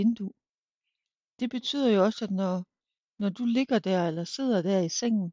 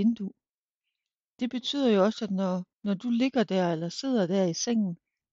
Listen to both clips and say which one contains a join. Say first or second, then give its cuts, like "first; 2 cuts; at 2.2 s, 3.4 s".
second; 1 cut; at 2.7 s